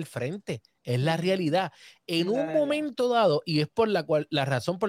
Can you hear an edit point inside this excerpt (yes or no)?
no